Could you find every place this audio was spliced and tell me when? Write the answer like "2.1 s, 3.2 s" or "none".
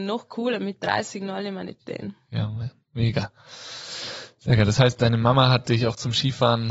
1.2 s, 1.8 s